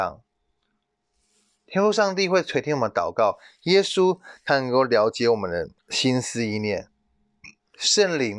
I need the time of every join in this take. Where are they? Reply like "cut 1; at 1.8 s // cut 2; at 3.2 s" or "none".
cut 1; at 5.8 s